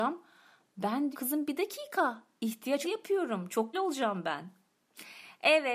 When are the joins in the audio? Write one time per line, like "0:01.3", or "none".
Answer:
0:01.1
0:02.8
0:03.7